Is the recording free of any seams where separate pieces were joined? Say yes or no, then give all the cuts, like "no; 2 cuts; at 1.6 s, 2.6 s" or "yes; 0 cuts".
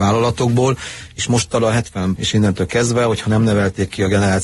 no; 1 cut; at 2.2 s